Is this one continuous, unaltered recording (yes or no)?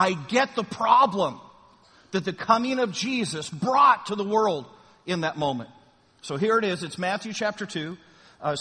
yes